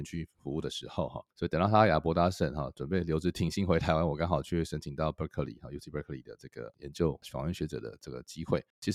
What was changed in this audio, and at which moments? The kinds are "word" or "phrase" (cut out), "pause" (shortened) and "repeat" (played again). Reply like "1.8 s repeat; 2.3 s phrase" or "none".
none